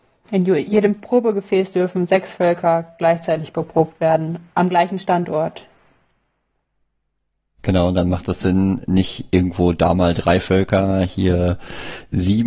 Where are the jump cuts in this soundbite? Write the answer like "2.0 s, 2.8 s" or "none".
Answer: none

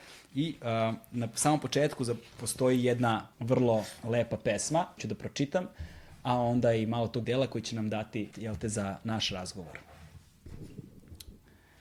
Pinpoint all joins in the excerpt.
3.3 s, 5.0 s, 7.2 s, 8.3 s

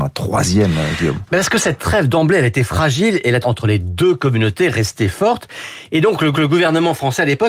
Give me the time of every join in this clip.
3.4 s, 6.3 s

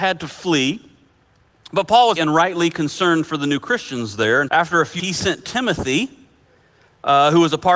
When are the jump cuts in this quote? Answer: 2.2 s, 4.5 s, 5.0 s

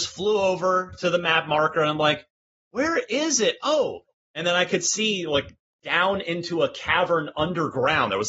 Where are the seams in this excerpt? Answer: none

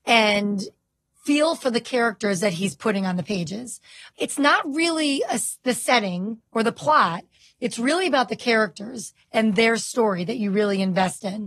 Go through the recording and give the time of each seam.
none

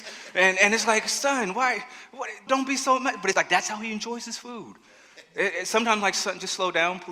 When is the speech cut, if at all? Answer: 2.5 s, 3.3 s

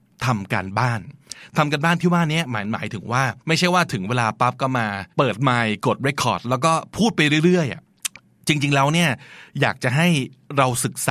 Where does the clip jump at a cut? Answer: 3.4 s, 5.1 s, 7.8 s

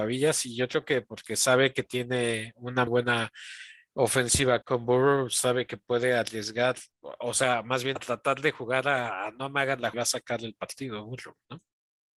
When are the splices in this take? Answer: 2.9 s, 4.6 s, 6.9 s, 8.0 s, 9.9 s

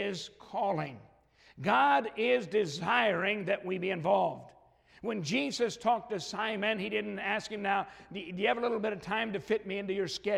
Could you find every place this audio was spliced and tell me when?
none

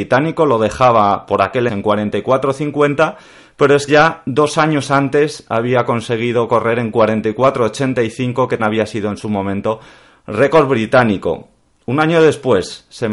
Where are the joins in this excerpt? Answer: 1.7 s, 3.9 s, 8.6 s

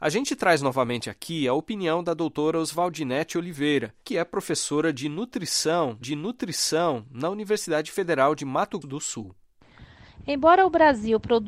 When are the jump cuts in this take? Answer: 4.0 s, 6.0 s, 8.8 s

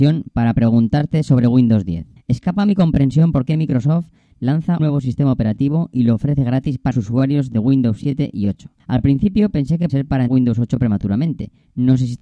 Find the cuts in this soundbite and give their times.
2.2 s, 4.8 s, 6.9 s, 8.8 s, 9.9 s, 10.3 s

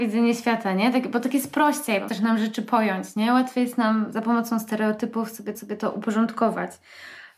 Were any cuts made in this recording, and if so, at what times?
2.1 s, 5.5 s

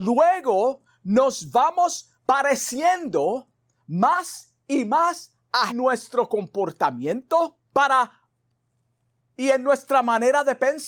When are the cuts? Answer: 2.1 s, 5.7 s, 7.6 s

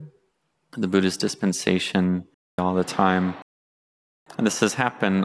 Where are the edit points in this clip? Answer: 2.6 s

